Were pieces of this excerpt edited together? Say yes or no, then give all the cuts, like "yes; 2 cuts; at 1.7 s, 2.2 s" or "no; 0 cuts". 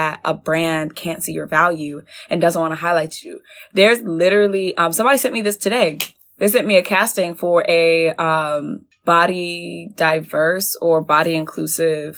no; 0 cuts